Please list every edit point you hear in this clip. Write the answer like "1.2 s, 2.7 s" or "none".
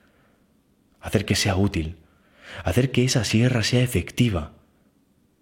none